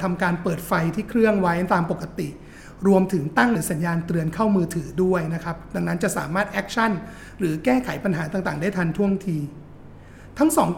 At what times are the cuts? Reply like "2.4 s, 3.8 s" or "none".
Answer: 3.5 s

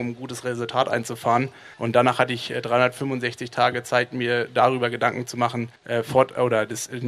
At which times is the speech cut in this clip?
1.7 s, 5.8 s

